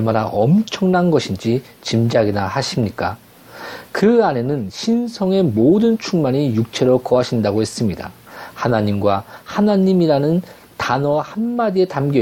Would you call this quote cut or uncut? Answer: uncut